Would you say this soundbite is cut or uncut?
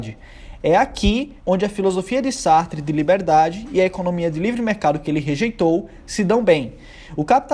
cut